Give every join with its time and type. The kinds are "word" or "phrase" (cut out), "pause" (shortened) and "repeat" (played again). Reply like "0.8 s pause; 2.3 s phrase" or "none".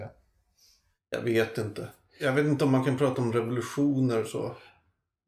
none

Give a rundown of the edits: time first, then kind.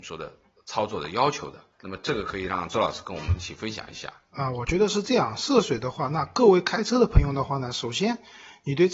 1.7 s pause

